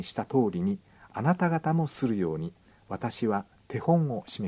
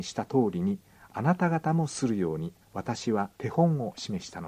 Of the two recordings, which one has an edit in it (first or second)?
second